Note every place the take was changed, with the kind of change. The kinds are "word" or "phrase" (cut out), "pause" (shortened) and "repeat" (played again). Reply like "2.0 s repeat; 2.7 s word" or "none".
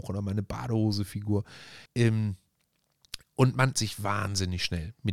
1.9 s pause; 3.7 s word